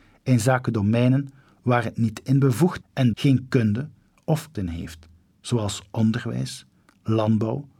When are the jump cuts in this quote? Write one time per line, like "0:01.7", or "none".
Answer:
0:02.8
0:03.1
0:04.5

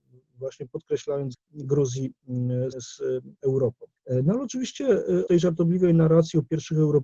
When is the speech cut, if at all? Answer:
0:01.3
0:02.7
0:04.0
0:05.3

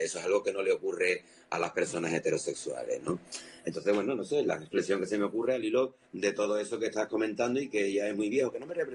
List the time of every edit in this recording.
0:06.0

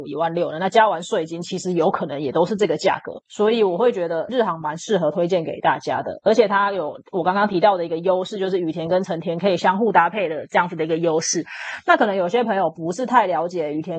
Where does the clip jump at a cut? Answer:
0:03.3
0:04.3

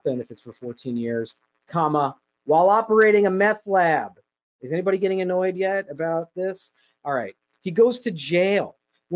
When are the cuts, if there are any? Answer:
none

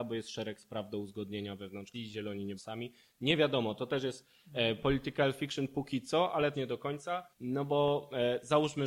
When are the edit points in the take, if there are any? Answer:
0:01.9
0:02.6
0:06.5
0:07.3

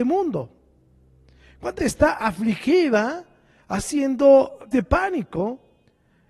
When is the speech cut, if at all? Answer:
0:01.8
0:04.7

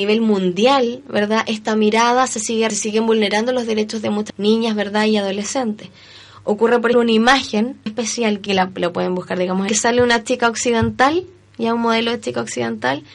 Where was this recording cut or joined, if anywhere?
0:02.7
0:04.3
0:06.9
0:07.9
0:08.5
0:09.7

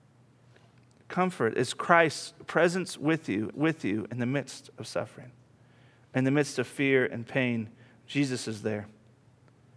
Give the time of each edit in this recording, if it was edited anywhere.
0:03.5

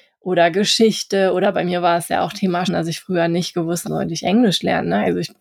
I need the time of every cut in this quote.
0:02.6
0:03.8

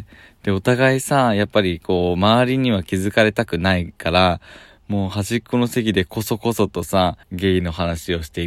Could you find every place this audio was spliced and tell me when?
0:07.2

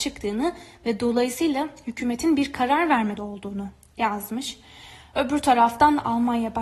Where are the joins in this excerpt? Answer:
0:03.2

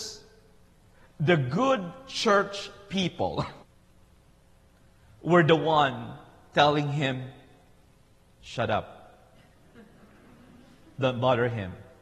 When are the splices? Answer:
0:03.6

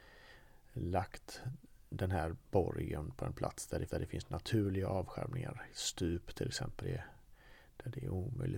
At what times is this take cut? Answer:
0:02.4
0:03.9
0:06.8

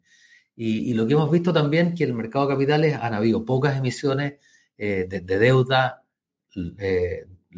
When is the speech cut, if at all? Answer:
none

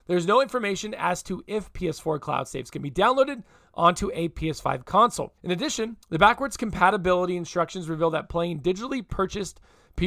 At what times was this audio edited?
0:05.4
0:06.0

